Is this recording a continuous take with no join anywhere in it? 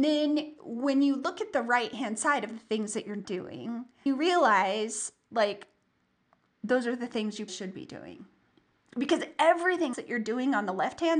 no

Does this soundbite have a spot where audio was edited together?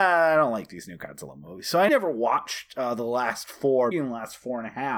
yes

